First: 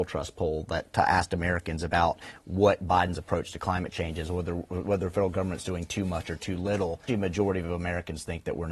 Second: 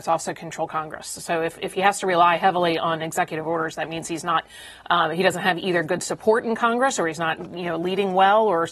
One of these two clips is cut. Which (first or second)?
first